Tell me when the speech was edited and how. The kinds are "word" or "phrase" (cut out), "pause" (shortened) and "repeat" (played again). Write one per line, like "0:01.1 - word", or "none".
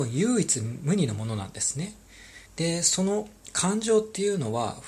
0:02.5 - pause